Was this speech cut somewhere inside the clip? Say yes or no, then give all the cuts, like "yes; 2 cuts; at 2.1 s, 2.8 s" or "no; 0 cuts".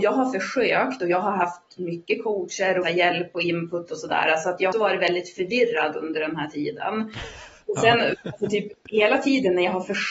yes; 2 cuts; at 2.8 s, 4.7 s